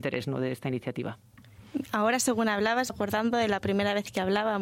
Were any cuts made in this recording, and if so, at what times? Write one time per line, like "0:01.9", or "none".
0:02.9